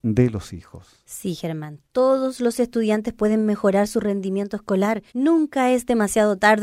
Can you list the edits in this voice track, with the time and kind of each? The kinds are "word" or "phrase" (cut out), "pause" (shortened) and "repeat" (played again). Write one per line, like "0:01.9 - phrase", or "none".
0:05.1 - pause